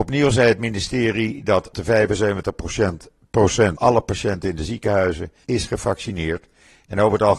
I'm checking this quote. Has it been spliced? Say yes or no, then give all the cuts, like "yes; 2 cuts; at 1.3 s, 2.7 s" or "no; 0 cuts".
yes; 3 cuts; at 1.7 s, 3.8 s, 5.4 s